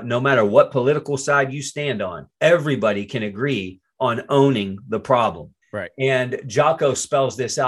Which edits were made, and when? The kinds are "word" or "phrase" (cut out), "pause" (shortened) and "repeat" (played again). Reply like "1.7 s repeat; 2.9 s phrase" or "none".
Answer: 2.3 s pause; 5.6 s pause